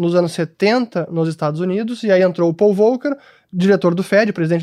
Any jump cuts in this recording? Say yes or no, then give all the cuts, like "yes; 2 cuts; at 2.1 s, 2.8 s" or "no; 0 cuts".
no; 0 cuts